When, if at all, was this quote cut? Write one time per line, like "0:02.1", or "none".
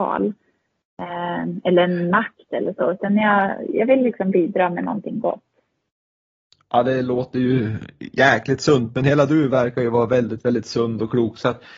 none